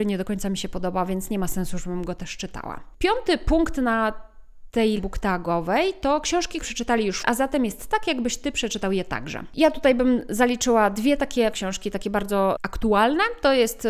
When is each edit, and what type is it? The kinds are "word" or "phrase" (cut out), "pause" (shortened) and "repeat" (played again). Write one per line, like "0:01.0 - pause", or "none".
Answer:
0:05.0 - word
0:06.6 - word
0:07.2 - word
0:11.5 - word